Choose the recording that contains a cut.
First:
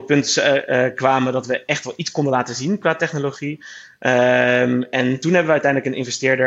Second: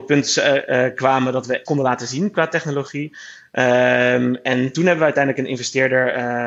second; 1 cut; at 1.7 s

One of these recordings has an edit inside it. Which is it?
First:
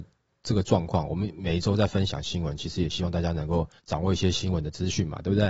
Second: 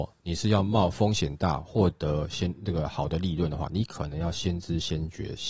first; 1 cut; at 3.8 s

